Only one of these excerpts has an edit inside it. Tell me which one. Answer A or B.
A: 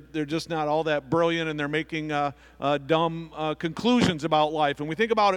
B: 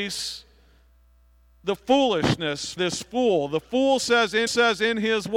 B